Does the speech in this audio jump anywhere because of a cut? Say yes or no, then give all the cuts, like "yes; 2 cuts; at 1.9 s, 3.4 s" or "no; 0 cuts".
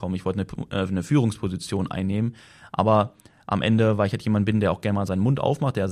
no; 0 cuts